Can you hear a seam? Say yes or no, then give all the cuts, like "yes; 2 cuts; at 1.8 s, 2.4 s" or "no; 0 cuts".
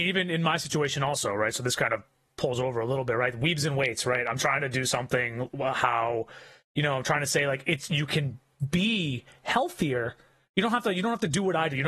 no; 0 cuts